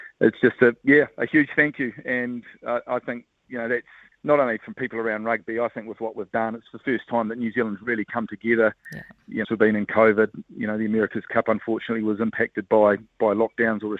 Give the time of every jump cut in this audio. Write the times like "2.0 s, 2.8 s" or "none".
4.1 s, 9.4 s

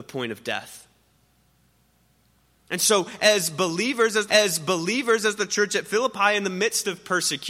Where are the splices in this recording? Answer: 4.3 s

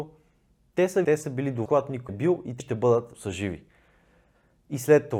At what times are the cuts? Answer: 1.0 s, 1.7 s, 2.1 s, 2.6 s, 3.1 s

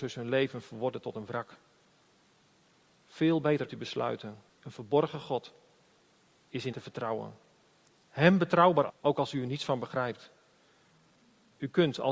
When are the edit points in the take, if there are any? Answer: 3.7 s, 4.5 s, 6.7 s, 8.9 s

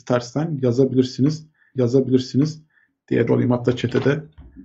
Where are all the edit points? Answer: 1.8 s, 3.3 s

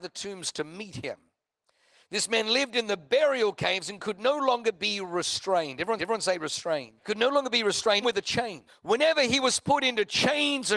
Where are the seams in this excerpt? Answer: 6.0 s, 7.0 s, 8.0 s, 8.7 s

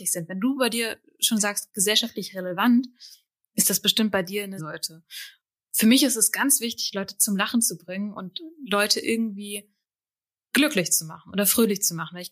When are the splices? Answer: 4.6 s

